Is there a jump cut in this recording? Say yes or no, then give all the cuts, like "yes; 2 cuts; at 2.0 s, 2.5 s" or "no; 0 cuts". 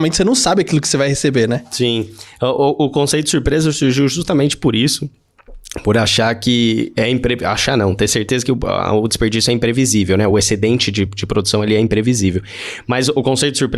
no; 0 cuts